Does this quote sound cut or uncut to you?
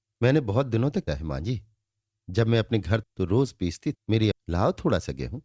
cut